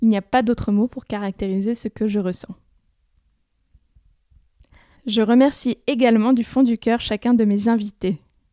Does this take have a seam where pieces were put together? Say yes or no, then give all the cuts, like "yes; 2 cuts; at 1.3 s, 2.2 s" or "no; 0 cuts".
no; 0 cuts